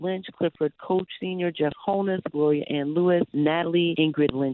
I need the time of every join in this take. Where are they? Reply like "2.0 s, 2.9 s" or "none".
none

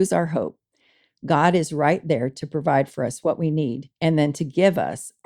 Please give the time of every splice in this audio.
3.9 s

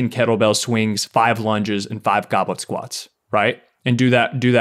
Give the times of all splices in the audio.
none

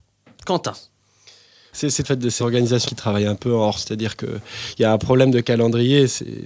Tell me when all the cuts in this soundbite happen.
2.0 s, 2.4 s, 2.9 s, 3.8 s

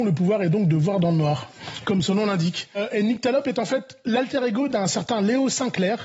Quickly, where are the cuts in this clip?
none

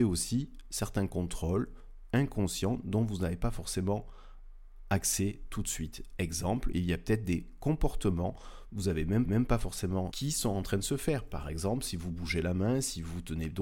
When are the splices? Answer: 9.3 s, 10.1 s

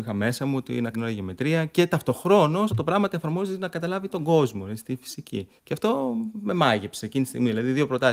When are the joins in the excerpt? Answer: 0.9 s, 2.7 s, 5.6 s

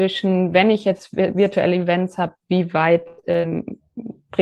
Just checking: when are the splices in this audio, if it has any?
3.2 s

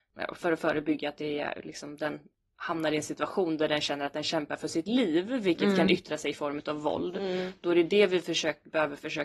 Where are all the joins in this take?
none

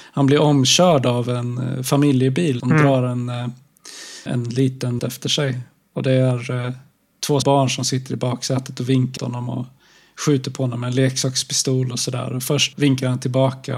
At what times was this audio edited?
2.6 s, 4.3 s, 5.0 s, 7.4 s, 9.2 s, 12.7 s

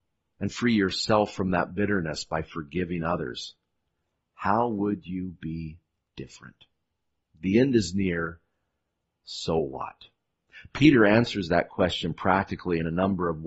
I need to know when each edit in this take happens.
none

